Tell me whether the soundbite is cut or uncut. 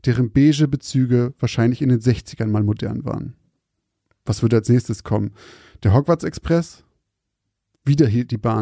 uncut